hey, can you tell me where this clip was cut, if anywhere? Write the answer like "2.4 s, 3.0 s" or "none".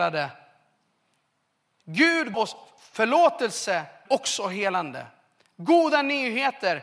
2.3 s, 4.1 s